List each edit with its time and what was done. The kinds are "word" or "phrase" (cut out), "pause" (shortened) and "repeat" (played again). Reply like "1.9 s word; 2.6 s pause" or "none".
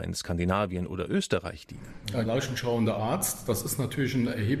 2.3 s word

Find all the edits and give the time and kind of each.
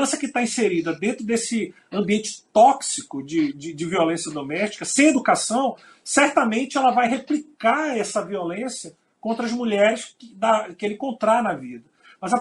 none

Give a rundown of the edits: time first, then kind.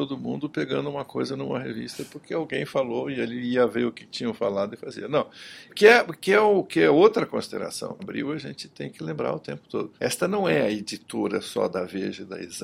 5.7 s word; 8.0 s phrase; 10.0 s pause

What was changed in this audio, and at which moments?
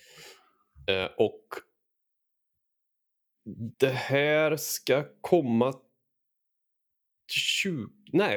3.7 s pause

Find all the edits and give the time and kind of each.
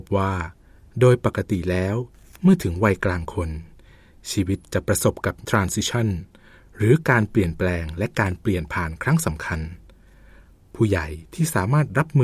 5.4 s word

